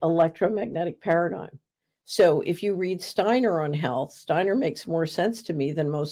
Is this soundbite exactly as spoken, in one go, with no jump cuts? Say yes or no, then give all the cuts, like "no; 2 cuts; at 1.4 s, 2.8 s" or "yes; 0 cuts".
yes; 0 cuts